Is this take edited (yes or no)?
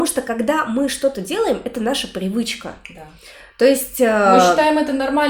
no